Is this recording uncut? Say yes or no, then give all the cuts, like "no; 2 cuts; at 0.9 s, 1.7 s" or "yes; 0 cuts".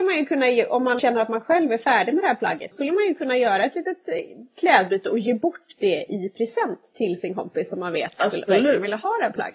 no; 2 cuts; at 1.0 s, 2.7 s